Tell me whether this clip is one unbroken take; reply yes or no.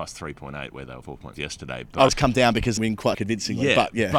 no